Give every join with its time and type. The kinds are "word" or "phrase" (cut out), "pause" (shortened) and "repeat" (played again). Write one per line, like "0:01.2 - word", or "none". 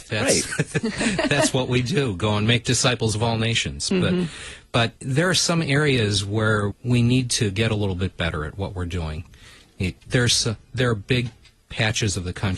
0:05.0 - pause
0:06.7 - word
0:10.0 - pause